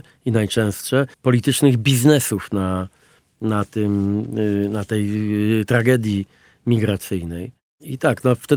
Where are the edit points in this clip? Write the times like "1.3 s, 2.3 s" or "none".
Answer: 1.1 s